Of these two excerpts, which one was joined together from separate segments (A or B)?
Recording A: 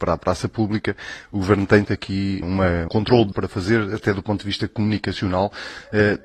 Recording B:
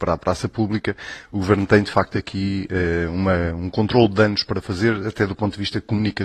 A